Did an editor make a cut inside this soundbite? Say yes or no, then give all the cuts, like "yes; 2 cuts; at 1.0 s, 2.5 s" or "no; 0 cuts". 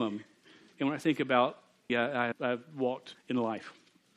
yes; 3 cuts; at 1.9 s, 2.3 s, 3.1 s